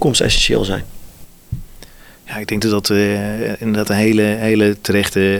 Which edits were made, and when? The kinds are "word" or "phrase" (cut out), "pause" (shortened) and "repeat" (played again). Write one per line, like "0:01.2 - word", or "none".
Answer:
none

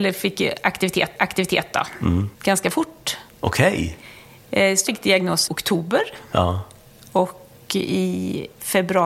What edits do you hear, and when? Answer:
0:01.2 - repeat
0:02.3 - pause
0:03.3 - pause
0:04.9 - word
0:05.5 - word

